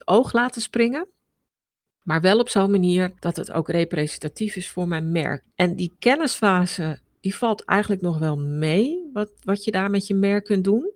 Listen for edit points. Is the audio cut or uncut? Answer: uncut